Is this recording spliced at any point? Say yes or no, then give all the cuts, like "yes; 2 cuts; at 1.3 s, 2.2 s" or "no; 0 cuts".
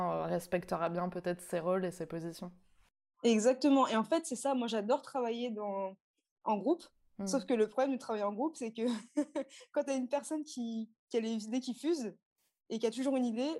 no; 0 cuts